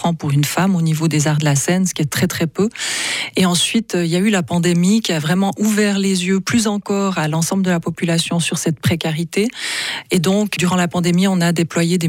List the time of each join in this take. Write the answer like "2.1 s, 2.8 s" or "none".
none

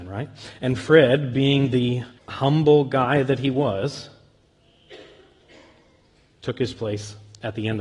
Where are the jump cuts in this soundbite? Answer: 2.2 s

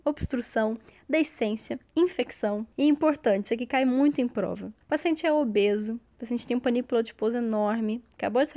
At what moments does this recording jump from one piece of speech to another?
2.7 s, 4.8 s

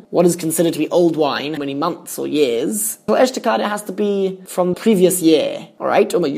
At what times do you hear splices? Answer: 1.6 s, 3.1 s, 4.7 s

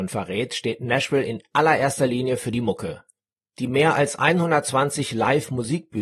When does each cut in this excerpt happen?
none

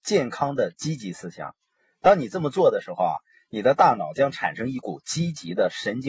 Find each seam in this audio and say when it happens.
none

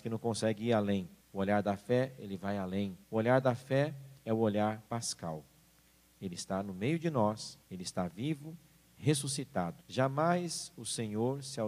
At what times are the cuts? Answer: 1.2 s, 3.0 s, 4.2 s, 4.9 s, 7.6 s, 9.8 s

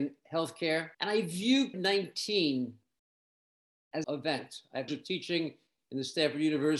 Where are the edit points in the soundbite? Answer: 0.9 s, 1.7 s, 4.0 s, 4.9 s

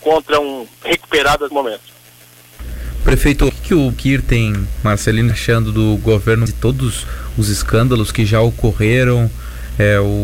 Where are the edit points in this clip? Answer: 1.5 s, 3.5 s, 3.9 s, 5.3 s, 6.5 s

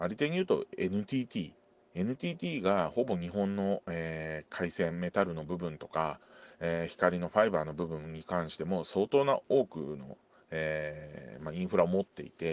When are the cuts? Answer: none

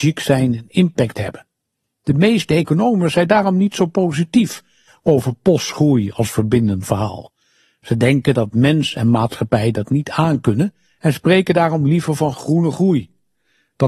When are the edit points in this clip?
none

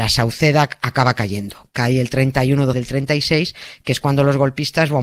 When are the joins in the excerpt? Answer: 2.7 s

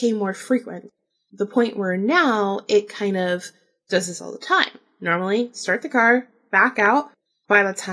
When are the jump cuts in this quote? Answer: none

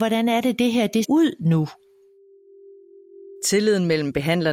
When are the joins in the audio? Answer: 1.0 s

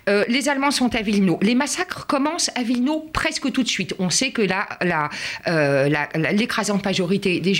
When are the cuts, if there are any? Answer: none

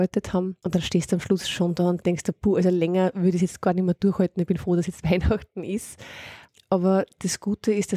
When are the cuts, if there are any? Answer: none

